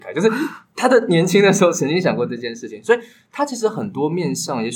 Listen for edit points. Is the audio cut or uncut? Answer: uncut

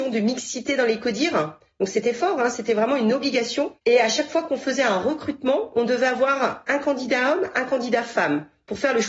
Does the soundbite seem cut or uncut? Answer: uncut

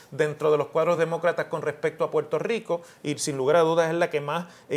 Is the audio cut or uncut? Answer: uncut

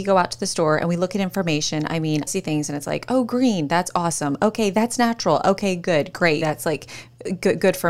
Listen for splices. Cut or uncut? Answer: cut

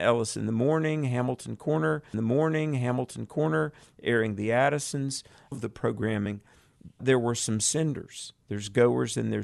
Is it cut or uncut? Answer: cut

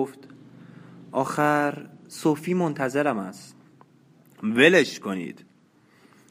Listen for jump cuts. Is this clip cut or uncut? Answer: uncut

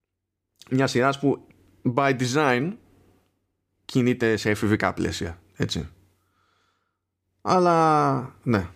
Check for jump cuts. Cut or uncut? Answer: uncut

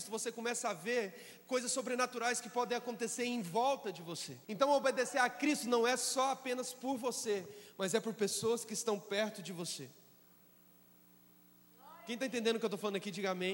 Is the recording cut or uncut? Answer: cut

